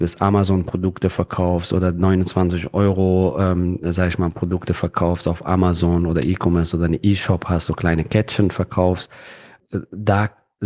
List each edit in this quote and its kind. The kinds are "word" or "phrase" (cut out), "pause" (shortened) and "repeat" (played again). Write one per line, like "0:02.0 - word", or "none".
none